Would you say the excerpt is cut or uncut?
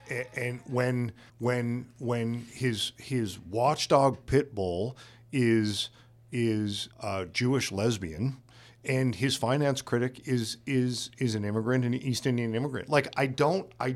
cut